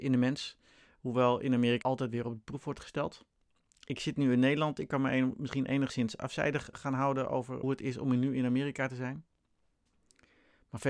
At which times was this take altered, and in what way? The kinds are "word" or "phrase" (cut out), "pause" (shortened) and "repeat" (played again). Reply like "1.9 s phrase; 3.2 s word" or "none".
1.8 s word; 6.7 s word; 7.6 s word